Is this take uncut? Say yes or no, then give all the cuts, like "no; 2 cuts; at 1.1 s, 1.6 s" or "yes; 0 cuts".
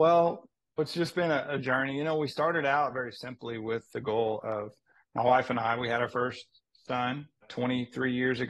yes; 0 cuts